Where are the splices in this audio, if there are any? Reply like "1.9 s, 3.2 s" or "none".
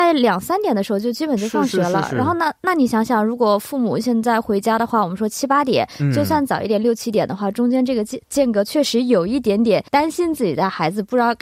9.9 s